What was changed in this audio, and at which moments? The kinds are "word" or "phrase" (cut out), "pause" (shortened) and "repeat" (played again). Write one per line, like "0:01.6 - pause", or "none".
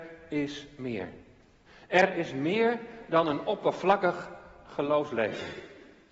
0:01.7 - pause